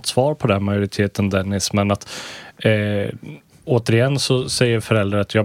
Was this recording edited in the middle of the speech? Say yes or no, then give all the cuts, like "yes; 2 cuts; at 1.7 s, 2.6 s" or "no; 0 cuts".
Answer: no; 0 cuts